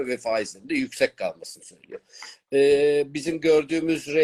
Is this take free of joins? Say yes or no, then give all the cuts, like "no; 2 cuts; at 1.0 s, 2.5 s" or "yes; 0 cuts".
yes; 0 cuts